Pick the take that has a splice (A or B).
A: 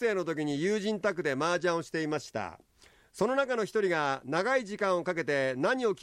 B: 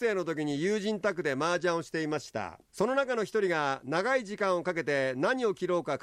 B